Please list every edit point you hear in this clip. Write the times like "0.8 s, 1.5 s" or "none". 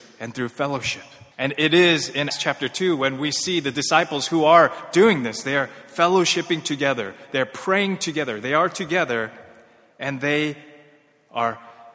1.3 s, 2.3 s